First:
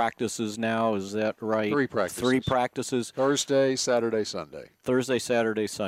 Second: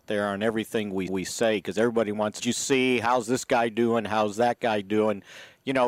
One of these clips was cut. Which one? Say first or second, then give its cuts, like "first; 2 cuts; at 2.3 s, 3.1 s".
second; 2 cuts; at 1.1 s, 2.4 s